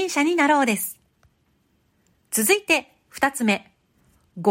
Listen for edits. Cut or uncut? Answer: uncut